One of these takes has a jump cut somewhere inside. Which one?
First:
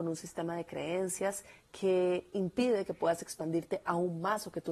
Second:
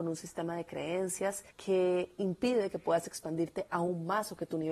second; 1 cut; at 1.5 s

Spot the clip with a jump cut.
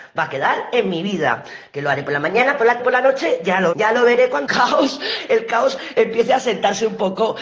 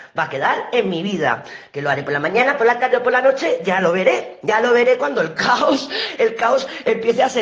first; 3 cuts; at 2.8 s, 3.7 s, 4.5 s

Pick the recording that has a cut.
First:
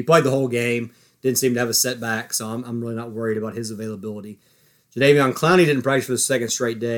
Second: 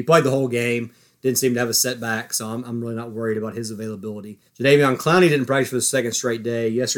second; 1 cut; at 4.5 s

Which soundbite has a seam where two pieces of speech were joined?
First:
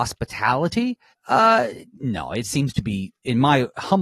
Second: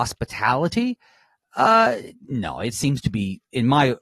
first; 1 cut; at 1.1 s

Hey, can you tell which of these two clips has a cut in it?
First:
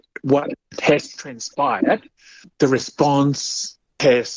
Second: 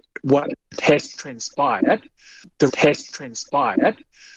second; 1 cut; at 2.7 s

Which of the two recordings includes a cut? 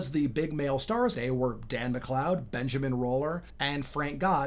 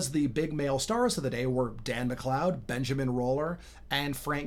first; 2 cuts; at 1.1 s, 3.5 s

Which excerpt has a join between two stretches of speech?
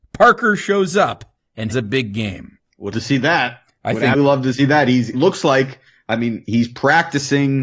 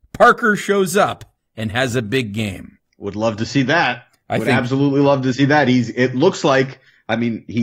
first; 5 cuts; at 1.7 s, 2.9 s, 4.1 s, 5.1 s, 6.4 s

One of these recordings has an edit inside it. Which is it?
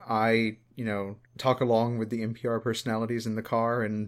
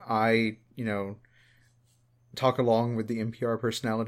first; 1 cut; at 1.2 s

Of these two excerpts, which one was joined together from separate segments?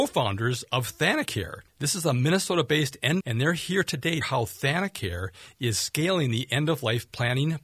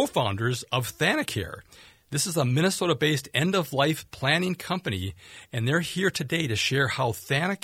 first; 3 cuts; at 1.7 s, 3.2 s, 4.2 s

